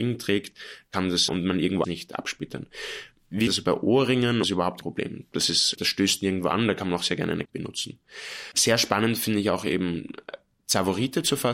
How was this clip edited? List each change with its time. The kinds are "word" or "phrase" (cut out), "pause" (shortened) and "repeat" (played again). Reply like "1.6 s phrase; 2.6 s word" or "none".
1.3 s word; 1.8 s phrase; 3.5 s phrase; 4.4 s phrase; 4.8 s word; 5.8 s word; 7.5 s word